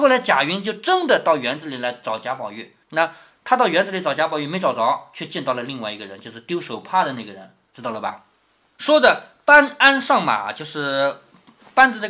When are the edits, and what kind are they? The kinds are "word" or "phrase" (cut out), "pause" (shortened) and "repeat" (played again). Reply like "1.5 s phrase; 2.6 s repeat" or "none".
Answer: 2.8 s pause